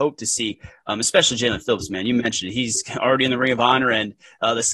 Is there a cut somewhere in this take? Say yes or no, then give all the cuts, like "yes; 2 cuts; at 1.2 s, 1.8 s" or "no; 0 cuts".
no; 0 cuts